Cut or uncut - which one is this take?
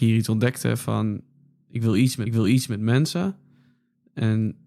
cut